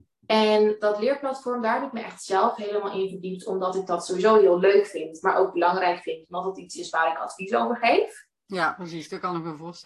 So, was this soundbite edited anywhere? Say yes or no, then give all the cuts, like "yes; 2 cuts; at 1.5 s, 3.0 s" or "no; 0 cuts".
no; 0 cuts